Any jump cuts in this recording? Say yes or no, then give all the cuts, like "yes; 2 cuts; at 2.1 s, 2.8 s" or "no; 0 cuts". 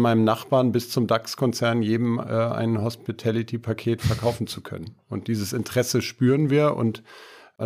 no; 0 cuts